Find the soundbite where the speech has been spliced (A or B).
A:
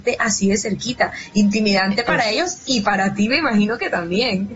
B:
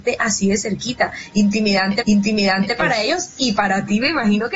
B